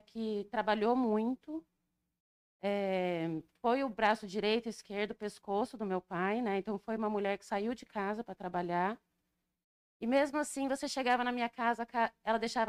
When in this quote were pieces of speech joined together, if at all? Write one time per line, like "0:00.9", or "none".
none